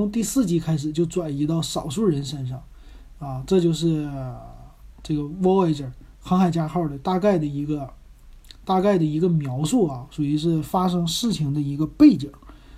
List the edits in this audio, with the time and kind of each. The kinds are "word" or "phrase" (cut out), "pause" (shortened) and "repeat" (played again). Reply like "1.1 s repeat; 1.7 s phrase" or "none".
6.1 s pause